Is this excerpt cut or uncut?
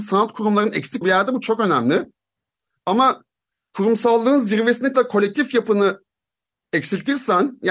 cut